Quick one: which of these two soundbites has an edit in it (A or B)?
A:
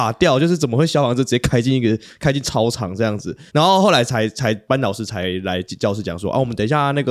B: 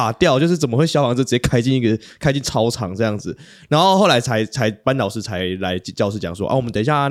A